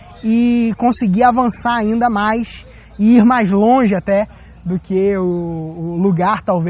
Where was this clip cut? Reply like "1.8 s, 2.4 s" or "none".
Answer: none